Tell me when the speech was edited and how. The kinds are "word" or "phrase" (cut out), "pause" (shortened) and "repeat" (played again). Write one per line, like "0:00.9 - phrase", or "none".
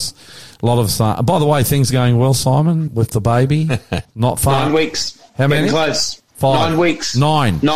0:02.9 - word
0:04.0 - pause
0:05.3 - pause
0:06.3 - pause